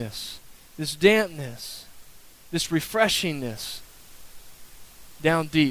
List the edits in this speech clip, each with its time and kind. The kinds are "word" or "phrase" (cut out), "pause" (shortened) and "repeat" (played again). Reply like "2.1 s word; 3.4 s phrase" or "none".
none